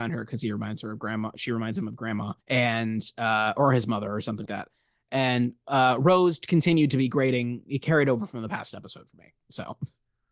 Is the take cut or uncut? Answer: cut